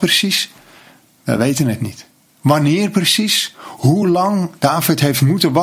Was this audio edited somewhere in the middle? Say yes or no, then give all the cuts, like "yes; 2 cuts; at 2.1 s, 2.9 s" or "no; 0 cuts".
no; 0 cuts